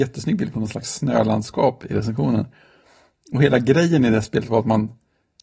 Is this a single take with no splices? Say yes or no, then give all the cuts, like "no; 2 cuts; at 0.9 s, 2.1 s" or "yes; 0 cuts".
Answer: yes; 0 cuts